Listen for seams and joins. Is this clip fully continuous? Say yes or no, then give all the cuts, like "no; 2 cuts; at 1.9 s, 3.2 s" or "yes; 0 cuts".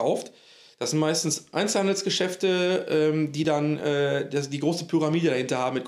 yes; 0 cuts